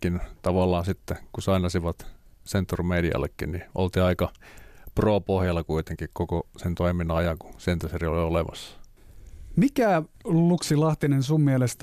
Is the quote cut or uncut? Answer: cut